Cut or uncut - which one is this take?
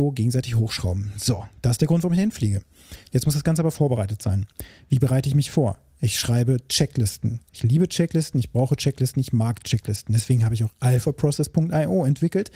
uncut